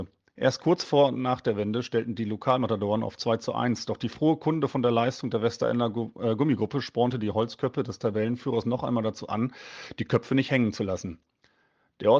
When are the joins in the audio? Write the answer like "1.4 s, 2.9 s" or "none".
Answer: none